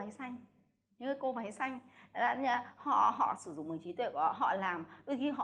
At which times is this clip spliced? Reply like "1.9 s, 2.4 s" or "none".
none